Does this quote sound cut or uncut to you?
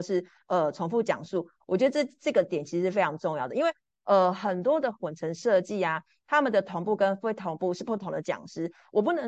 uncut